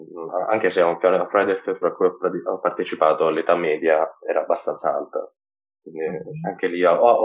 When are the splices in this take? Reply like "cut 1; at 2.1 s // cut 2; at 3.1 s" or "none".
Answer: cut 1; at 1.8 s